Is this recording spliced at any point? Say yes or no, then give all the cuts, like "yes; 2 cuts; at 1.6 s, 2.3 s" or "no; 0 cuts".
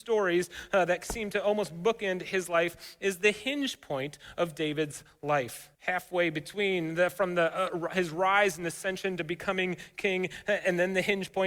yes; 1 cut; at 5.7 s